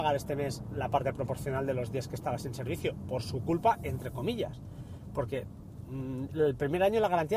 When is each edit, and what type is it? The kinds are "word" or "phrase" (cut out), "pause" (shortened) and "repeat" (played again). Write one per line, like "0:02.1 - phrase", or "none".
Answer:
none